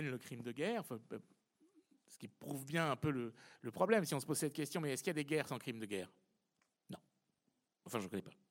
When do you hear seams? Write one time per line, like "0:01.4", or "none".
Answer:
none